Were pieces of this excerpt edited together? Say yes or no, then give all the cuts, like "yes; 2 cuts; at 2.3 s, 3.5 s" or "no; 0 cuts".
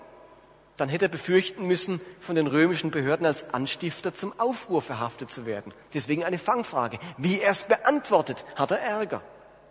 no; 0 cuts